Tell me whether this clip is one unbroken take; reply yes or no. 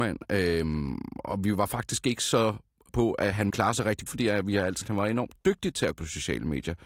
no